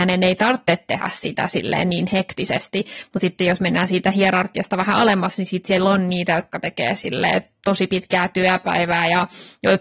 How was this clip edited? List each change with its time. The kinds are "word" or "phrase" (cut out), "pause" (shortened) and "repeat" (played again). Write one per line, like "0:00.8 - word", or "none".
none